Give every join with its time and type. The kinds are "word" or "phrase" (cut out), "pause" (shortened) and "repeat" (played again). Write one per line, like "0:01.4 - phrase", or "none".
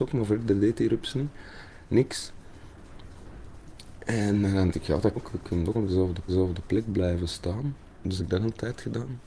0:04.7 - word
0:05.2 - word
0:05.7 - word
0:06.3 - repeat
0:08.2 - word